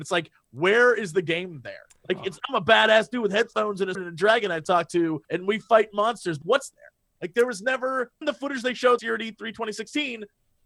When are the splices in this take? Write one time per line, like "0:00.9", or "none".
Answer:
0:01.9
0:02.4
0:03.9
0:05.2
0:06.4
0:06.7
0:08.2
0:09.0